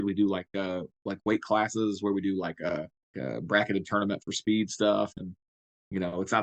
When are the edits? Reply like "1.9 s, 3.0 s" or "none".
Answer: 3.1 s